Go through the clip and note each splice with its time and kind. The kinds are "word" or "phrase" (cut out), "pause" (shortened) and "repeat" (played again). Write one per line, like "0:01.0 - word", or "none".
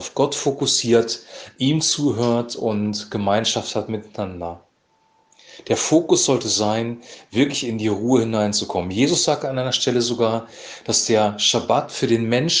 none